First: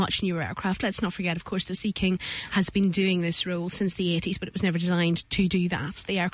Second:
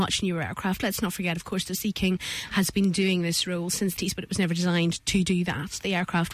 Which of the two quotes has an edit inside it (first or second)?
second